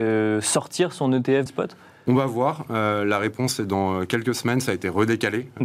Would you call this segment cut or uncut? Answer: cut